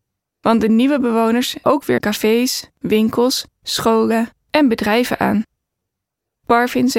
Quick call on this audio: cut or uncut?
cut